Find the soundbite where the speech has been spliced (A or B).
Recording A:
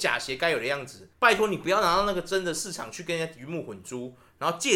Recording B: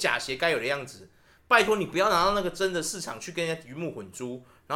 A